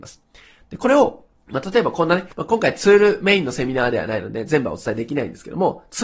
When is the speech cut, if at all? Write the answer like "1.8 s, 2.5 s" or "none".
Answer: 1.4 s, 2.3 s